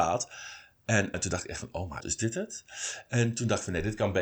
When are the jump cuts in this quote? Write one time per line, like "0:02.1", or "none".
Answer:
0:01.1
0:02.0